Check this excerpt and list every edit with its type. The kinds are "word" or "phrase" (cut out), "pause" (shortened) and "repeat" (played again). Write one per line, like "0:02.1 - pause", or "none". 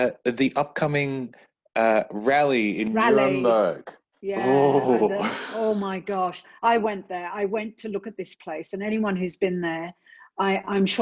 none

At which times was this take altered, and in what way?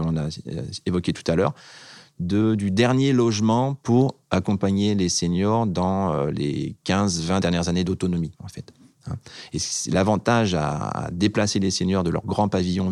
none

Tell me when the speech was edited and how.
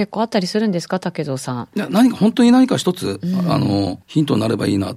0:04.0 - pause

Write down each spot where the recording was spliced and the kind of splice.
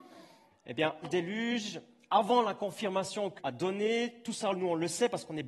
0:01.0 - word
0:03.4 - word

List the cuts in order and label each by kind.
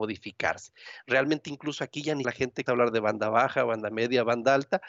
0:02.2 - word
0:02.7 - word

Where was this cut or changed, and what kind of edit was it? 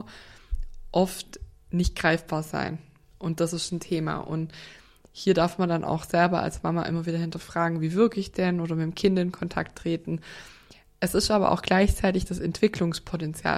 none

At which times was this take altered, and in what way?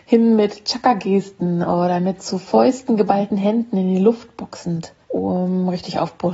0:05.0 - pause

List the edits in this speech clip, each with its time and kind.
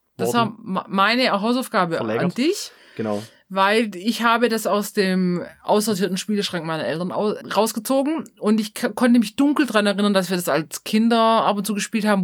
0:07.4 - word

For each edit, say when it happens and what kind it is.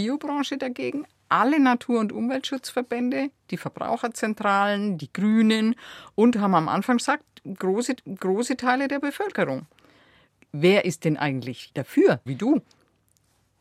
0:07.0 - word
0:08.0 - repeat
0:12.3 - word

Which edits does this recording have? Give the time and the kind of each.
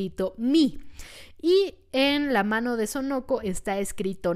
none

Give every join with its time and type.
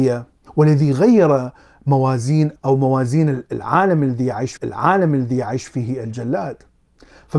0:02.6 - word
0:04.6 - repeat

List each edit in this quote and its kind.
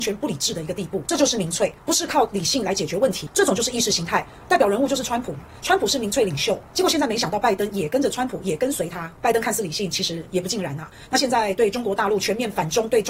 0:01.8 - pause

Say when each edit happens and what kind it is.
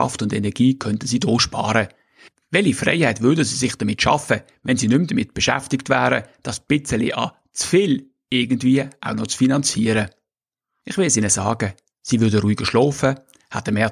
none

